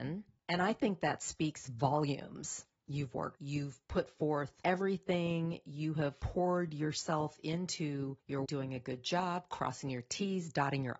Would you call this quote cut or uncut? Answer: cut